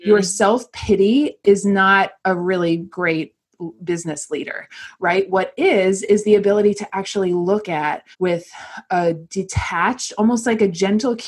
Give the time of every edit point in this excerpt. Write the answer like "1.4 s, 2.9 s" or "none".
8.1 s